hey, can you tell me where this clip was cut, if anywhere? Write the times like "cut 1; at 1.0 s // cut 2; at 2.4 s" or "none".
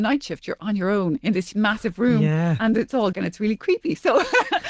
cut 1; at 3.1 s